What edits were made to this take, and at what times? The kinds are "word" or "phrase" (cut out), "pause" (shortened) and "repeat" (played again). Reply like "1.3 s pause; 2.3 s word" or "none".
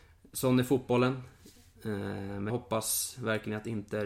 2.5 s word